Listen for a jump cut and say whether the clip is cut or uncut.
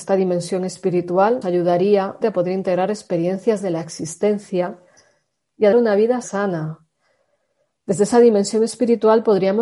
cut